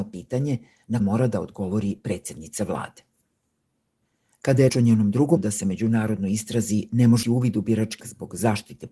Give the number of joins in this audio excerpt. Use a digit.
5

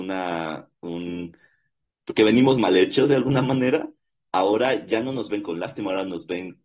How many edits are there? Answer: 0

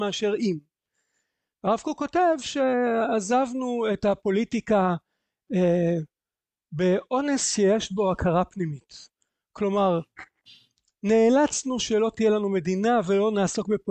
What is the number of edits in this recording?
0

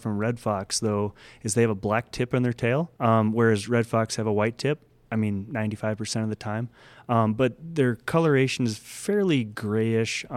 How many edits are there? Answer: 1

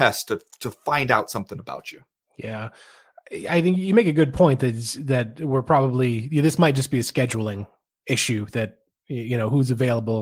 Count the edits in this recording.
0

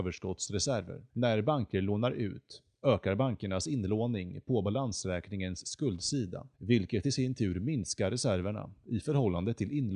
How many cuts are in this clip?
2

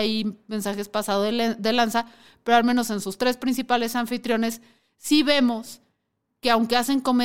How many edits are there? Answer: 0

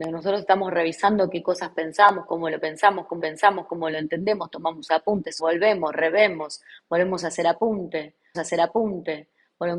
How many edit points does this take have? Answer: 3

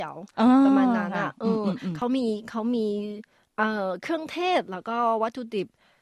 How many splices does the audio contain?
0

